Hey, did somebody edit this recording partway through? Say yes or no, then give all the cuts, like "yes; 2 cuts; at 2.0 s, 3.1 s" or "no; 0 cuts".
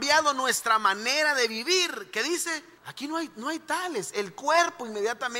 yes; 1 cut; at 2.8 s